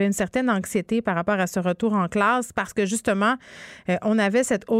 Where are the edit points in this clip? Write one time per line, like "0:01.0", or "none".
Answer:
none